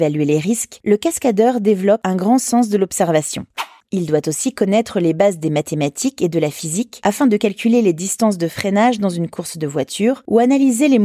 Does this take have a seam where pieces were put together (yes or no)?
no